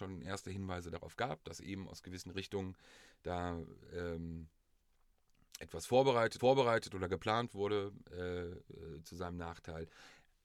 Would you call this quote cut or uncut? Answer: cut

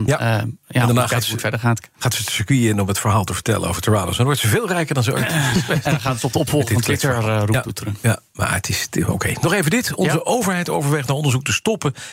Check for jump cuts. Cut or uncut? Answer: uncut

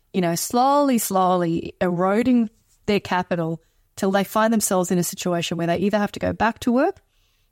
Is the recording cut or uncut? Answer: uncut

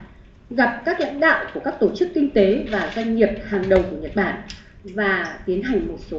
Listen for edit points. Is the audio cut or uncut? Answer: uncut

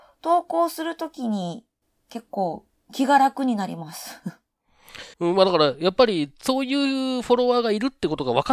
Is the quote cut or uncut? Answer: cut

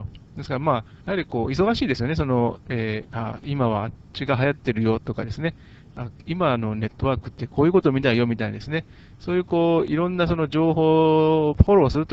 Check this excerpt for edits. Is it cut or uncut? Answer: cut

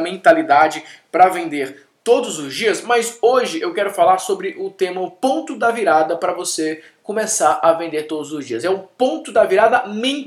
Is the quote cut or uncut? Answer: uncut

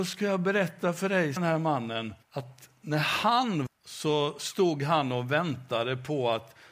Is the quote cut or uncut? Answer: cut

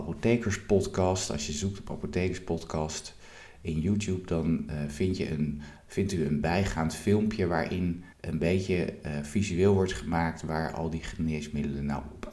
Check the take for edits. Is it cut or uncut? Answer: cut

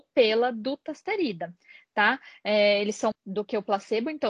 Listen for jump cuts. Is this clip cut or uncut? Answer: cut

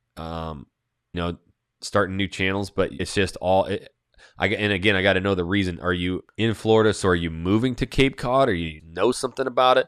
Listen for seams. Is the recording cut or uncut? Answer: cut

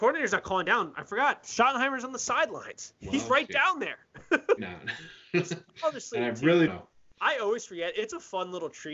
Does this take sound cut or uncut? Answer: cut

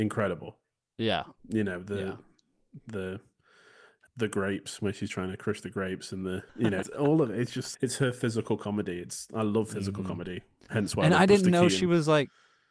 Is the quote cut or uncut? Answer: cut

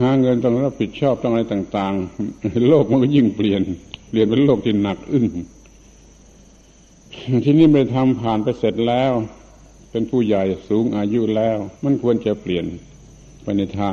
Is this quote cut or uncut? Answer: cut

